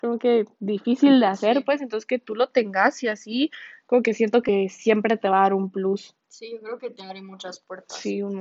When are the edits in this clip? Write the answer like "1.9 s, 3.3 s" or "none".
none